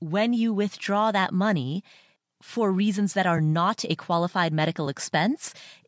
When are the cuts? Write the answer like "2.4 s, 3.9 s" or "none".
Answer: none